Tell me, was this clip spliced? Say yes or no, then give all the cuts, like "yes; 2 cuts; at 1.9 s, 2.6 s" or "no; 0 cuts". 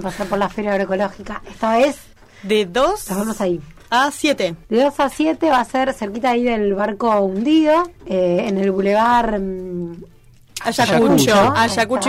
yes; 3 cuts; at 2.1 s, 4.6 s, 8.0 s